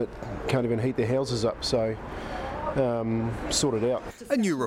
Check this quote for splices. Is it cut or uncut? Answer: uncut